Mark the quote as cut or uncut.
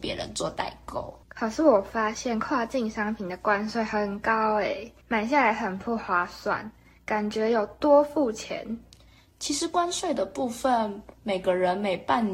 cut